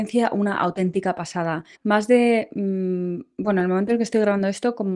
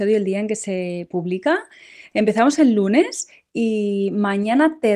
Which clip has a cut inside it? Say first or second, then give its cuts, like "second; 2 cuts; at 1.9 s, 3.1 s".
first; 1 cut; at 1.7 s